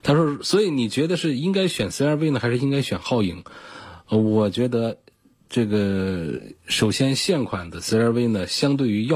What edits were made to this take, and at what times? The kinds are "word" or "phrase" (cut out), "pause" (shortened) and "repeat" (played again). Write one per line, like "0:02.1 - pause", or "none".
none